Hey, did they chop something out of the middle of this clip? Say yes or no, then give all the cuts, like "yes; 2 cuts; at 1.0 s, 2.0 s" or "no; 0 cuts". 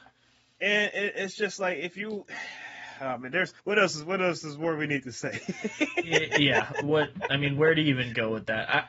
yes; 1 cut; at 3.6 s